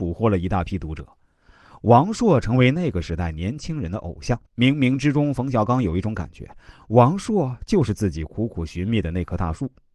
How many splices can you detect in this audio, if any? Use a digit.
1